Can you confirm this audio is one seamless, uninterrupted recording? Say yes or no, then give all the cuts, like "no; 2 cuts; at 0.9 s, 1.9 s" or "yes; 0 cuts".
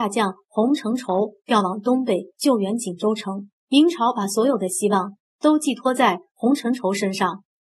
no; 1 cut; at 3.6 s